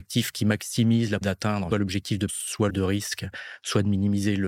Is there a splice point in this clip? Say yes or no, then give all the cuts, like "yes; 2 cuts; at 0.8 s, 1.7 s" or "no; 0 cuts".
yes; 4 cuts; at 1.2 s, 1.7 s, 2.3 s, 2.7 s